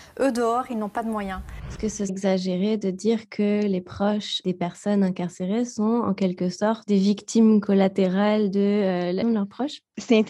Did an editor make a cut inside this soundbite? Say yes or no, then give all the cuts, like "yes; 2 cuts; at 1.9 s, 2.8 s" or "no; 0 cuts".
yes; 2 cuts; at 2.1 s, 9.2 s